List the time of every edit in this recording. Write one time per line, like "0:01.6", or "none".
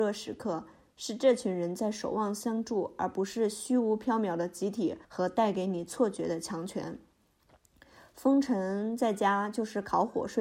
0:05.0